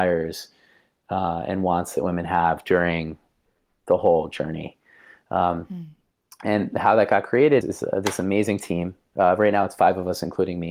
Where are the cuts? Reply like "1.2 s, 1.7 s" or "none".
7.6 s